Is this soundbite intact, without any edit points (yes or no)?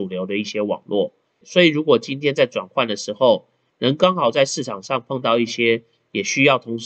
yes